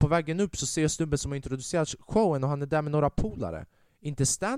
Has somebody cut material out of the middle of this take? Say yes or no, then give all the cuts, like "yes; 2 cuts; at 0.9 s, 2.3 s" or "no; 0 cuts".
no; 0 cuts